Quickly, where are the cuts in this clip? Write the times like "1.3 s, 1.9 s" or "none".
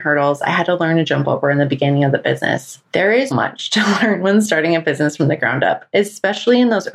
2.8 s, 3.3 s